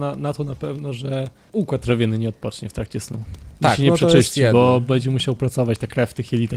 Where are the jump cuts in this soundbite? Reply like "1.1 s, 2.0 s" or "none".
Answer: none